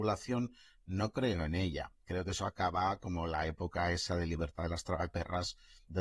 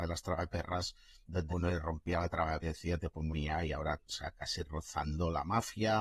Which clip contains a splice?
second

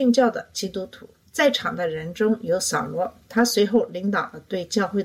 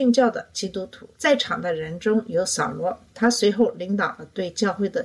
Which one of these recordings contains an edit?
second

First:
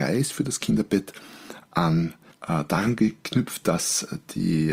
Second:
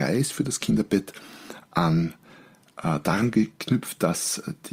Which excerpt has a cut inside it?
first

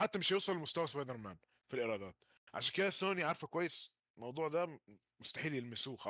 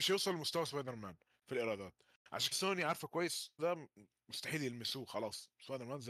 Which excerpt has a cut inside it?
second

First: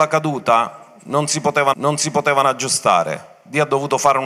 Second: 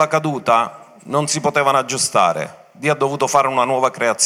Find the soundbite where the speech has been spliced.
first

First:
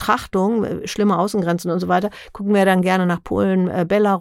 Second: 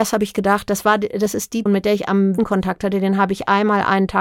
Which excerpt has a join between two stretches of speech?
second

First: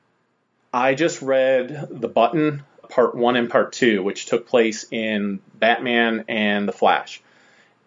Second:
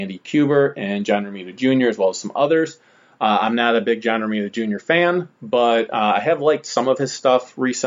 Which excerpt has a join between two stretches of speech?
first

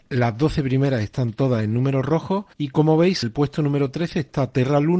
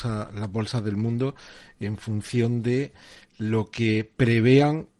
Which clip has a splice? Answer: first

